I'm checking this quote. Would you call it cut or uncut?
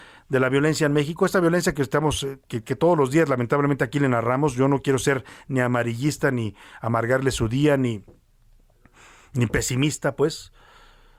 uncut